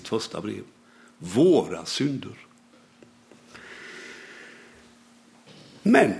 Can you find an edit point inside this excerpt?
no; 0 cuts

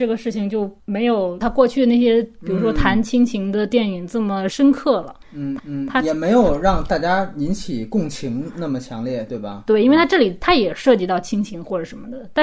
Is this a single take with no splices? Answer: no; 1 cut; at 5.6 s

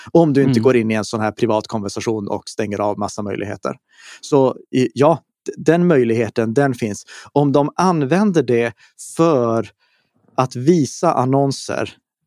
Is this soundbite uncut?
yes; 0 cuts

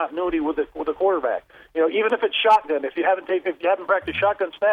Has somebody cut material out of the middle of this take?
no; 0 cuts

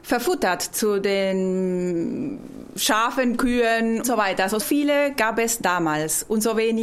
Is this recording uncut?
no; 2 cuts; at 4.0 s, 4.6 s

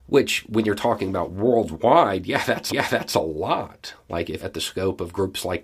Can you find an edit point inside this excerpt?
yes; 2 cuts; at 2.7 s, 4.4 s

